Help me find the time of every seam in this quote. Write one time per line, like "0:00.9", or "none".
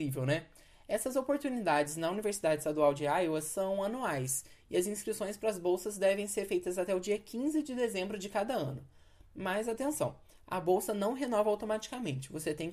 none